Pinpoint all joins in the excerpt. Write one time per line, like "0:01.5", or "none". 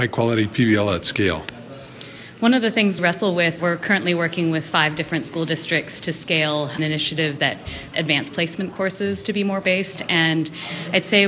0:03.0
0:03.6
0:06.8
0:07.9
0:09.6